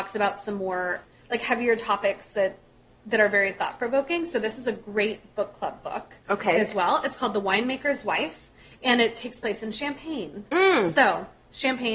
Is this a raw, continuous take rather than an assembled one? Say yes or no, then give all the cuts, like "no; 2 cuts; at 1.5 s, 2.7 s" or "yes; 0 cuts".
yes; 0 cuts